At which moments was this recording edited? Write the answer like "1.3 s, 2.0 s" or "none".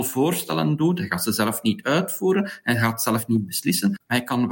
none